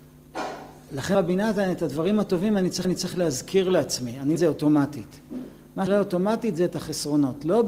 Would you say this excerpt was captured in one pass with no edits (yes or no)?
no